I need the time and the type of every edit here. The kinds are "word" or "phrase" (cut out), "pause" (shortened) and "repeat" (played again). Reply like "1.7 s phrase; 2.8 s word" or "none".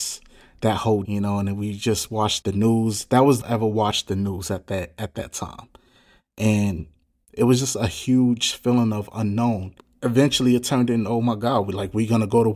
1.0 s word; 2.4 s word; 3.4 s phrase